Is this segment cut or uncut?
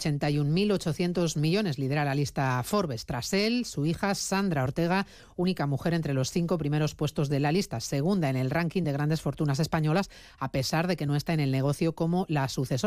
uncut